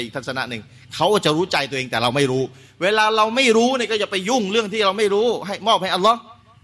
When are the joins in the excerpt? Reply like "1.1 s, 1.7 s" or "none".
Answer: none